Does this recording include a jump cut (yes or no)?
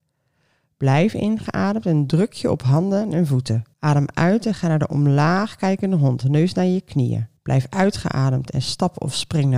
yes